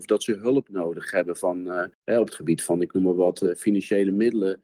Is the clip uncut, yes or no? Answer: yes